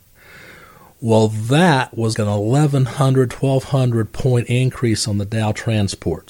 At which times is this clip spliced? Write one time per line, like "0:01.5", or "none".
0:02.1